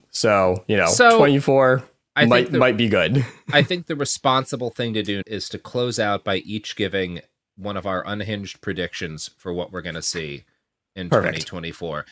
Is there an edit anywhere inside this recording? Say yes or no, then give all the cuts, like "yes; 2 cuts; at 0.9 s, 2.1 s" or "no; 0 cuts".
yes; 1 cut; at 5.2 s